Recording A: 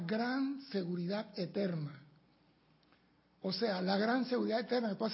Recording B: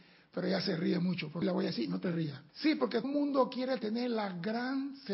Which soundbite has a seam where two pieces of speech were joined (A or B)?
B